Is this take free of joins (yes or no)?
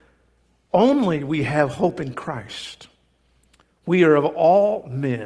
yes